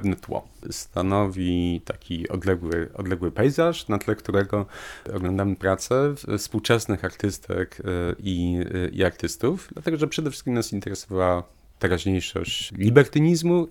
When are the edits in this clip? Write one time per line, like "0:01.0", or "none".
none